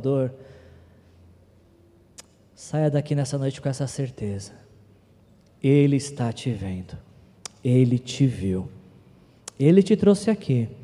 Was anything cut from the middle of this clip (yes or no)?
no